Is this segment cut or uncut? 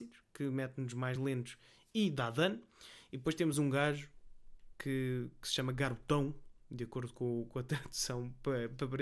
uncut